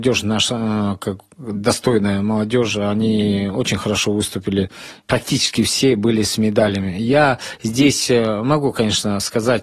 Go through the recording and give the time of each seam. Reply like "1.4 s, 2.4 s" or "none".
none